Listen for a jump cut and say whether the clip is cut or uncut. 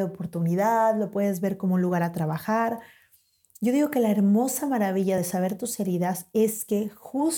uncut